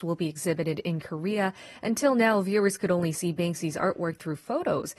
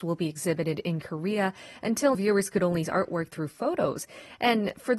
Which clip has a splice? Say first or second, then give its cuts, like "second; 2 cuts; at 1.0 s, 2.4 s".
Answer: second; 2 cuts; at 2.1 s, 2.8 s